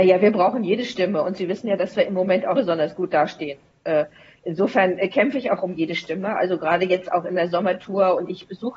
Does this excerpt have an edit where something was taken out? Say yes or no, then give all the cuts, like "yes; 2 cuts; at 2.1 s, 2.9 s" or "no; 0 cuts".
yes; 1 cut; at 2.5 s